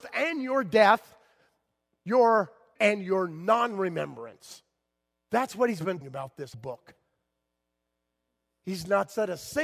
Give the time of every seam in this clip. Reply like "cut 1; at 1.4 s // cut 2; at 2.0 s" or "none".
cut 1; at 2.8 s // cut 2; at 5.1 s // cut 3; at 6.0 s // cut 4; at 6.5 s

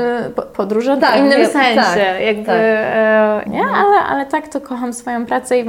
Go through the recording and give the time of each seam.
cut 1; at 1.0 s // cut 2; at 3.4 s

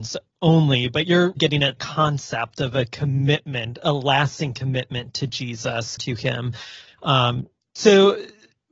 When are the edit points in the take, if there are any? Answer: cut 1; at 1.4 s // cut 2; at 1.8 s // cut 3; at 6.0 s

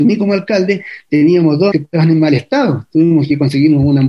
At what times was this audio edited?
cut 1; at 1.7 s

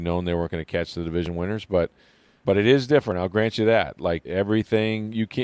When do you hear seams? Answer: cut 1; at 4.3 s

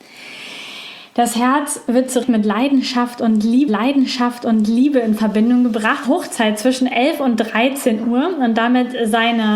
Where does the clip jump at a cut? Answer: cut 1; at 2.2 s // cut 2; at 3.7 s // cut 3; at 6.0 s

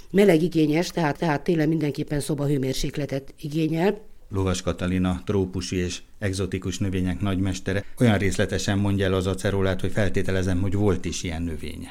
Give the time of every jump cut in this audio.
cut 1; at 1.2 s // cut 2; at 8.0 s

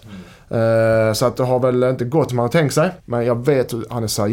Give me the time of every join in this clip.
cut 1; at 2.3 s // cut 2; at 3.0 s

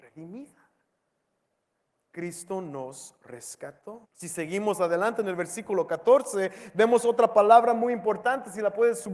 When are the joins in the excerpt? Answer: cut 1; at 4.1 s

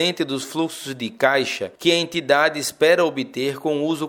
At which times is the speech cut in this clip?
cut 1; at 1.8 s

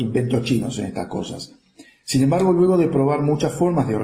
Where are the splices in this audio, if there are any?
none

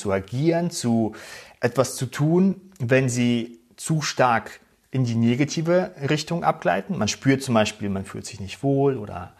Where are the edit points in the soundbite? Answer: none

